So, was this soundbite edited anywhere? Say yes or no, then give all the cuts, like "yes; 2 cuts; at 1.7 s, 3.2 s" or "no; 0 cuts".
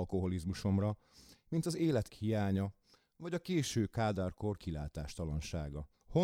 yes; 1 cut; at 2.1 s